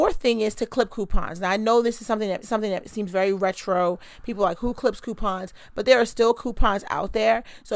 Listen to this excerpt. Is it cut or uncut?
cut